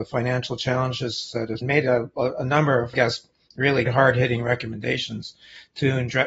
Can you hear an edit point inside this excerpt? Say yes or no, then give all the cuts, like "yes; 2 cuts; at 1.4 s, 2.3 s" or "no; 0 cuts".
yes; 3 cuts; at 1.6 s, 2.9 s, 3.9 s